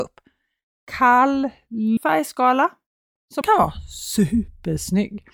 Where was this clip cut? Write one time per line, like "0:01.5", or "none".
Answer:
0:02.0
0:03.4